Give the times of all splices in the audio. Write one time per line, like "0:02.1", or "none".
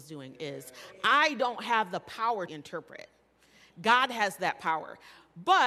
0:02.5

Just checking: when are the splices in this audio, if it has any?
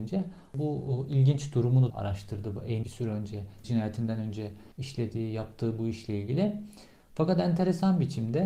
0:01.9
0:02.8
0:03.6
0:04.7

